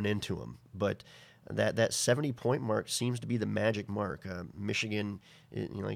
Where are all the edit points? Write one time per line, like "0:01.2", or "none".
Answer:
none